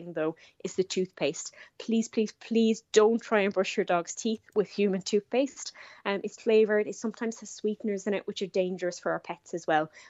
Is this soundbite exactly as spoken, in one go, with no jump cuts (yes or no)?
no